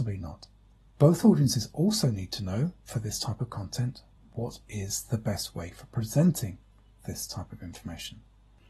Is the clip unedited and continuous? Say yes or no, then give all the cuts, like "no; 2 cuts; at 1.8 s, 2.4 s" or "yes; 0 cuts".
yes; 0 cuts